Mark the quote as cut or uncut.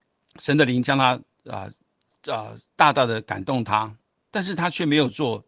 uncut